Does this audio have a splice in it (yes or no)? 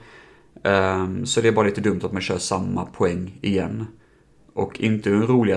no